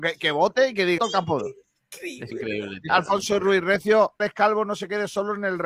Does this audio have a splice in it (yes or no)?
yes